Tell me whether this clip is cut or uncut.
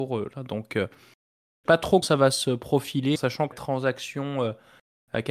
cut